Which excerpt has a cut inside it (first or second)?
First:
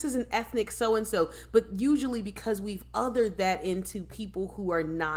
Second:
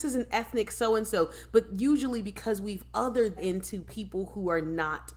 second